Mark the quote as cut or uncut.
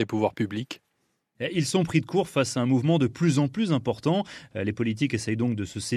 uncut